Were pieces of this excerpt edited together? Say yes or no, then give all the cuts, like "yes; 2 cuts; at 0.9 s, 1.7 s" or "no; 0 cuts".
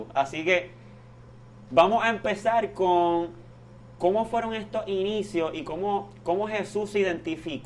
no; 0 cuts